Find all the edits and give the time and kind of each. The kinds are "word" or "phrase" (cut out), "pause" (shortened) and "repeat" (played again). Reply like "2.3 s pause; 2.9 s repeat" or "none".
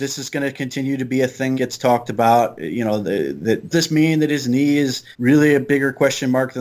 1.5 s word; 3.7 s phrase; 5.1 s pause